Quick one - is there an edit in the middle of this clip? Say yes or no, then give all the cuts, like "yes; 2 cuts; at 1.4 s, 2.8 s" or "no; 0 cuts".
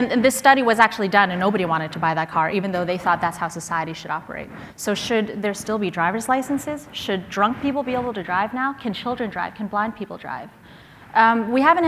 no; 0 cuts